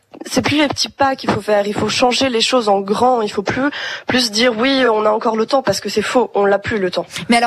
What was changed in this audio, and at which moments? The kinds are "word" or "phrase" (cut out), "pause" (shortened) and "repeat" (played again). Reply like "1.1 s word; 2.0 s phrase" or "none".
none